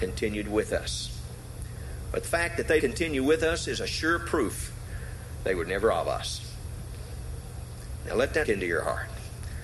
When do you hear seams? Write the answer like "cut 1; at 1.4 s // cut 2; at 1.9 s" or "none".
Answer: cut 1; at 2.2 s // cut 2; at 2.8 s // cut 3; at 8.4 s